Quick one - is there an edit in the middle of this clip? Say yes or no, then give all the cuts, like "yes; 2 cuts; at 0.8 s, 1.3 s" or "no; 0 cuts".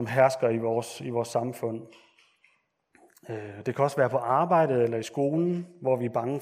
no; 0 cuts